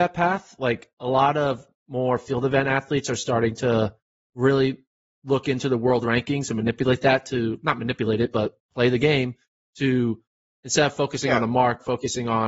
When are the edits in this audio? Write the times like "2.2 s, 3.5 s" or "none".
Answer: none